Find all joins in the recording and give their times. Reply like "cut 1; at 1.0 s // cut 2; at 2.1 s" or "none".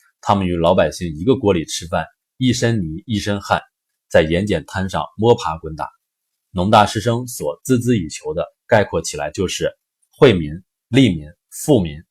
none